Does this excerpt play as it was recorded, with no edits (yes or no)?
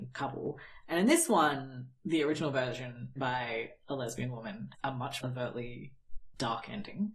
no